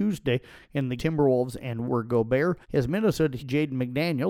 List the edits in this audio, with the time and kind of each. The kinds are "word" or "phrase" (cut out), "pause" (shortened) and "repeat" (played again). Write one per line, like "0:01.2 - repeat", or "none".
0:01.0 - phrase
0:01.9 - word
0:02.6 - pause
0:03.4 - word